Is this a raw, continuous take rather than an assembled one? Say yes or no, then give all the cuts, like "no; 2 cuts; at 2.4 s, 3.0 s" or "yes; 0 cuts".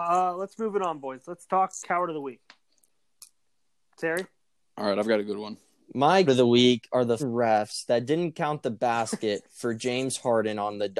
no; 2 cuts; at 6.3 s, 7.2 s